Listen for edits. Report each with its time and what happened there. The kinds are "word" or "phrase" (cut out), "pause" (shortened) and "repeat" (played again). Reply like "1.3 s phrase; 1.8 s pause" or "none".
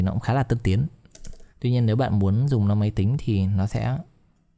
1.5 s pause